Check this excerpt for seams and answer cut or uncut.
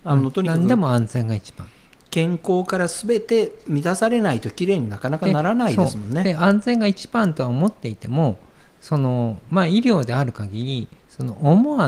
uncut